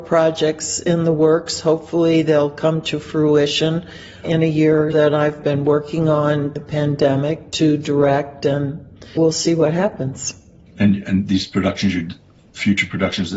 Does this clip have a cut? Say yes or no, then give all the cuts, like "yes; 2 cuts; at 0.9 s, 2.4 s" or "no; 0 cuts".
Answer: yes; 4 cuts; at 4.2 s, 4.9 s, 6.6 s, 9.2 s